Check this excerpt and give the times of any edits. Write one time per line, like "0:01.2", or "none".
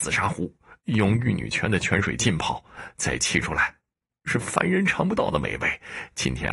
none